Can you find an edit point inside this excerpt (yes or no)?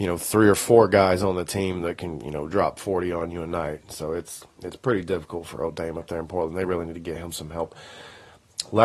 no